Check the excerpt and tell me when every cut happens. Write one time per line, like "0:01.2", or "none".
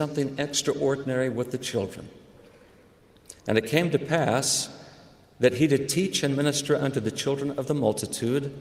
0:03.4